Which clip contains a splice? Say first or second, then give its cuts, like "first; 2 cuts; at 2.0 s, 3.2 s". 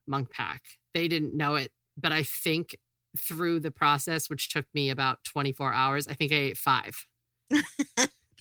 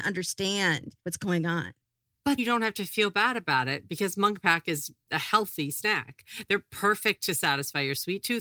second; 2 cuts; at 1.0 s, 2.4 s